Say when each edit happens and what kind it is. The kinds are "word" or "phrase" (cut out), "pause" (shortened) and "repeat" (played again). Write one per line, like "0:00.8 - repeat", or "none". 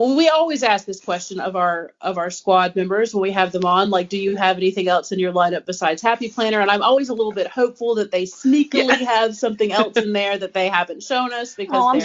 none